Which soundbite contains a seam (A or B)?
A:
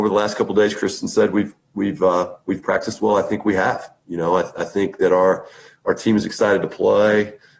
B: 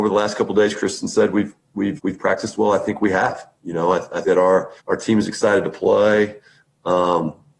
B